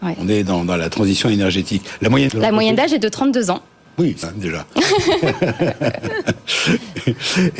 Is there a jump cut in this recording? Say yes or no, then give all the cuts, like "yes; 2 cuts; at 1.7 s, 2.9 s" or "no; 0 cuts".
yes; 2 cuts; at 2.3 s, 4.2 s